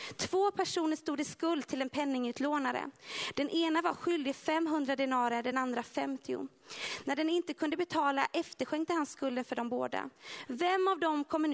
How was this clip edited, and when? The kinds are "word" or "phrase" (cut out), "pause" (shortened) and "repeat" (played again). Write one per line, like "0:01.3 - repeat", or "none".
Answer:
none